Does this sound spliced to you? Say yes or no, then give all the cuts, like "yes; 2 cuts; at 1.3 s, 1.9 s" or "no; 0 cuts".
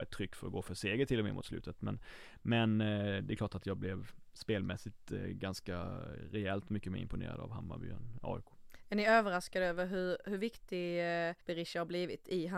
yes; 1 cut; at 11.4 s